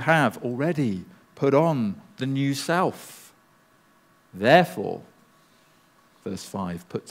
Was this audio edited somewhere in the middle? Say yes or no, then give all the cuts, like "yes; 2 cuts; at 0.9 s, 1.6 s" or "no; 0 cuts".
no; 0 cuts